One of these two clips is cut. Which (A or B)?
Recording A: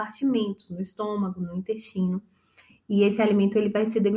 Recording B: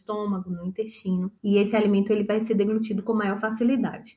B